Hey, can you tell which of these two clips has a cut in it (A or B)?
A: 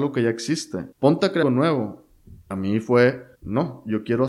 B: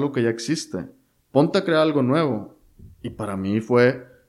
A